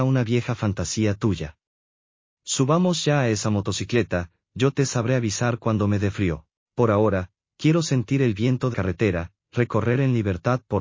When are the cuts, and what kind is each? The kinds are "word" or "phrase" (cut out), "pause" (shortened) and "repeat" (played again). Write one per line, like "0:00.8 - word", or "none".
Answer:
0:08.7 - word